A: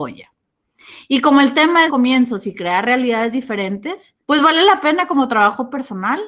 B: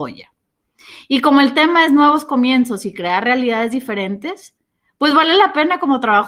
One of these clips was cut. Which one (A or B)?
A